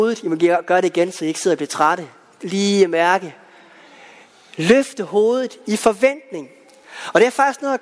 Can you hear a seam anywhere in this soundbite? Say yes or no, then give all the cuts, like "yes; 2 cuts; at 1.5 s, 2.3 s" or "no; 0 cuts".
no; 0 cuts